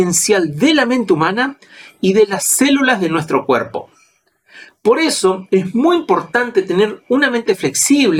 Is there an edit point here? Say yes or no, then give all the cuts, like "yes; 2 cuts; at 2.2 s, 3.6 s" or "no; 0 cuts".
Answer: no; 0 cuts